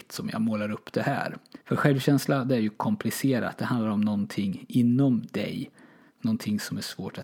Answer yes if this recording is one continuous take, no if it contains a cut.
no